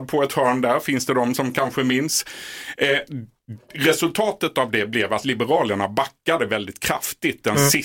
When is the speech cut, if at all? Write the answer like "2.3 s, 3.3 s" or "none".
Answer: none